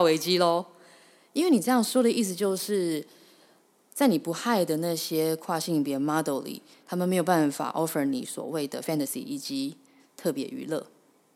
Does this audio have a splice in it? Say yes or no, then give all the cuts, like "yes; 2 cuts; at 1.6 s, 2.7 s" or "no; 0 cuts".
no; 0 cuts